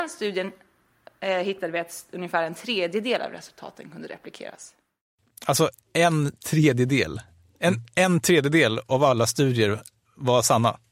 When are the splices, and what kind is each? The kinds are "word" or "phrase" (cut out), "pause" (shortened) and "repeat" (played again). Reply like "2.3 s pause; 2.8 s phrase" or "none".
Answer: none